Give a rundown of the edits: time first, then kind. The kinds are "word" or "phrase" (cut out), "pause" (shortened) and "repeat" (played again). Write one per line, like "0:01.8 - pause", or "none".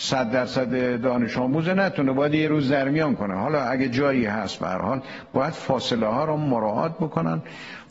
none